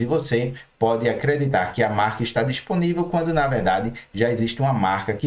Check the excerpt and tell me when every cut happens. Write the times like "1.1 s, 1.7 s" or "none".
none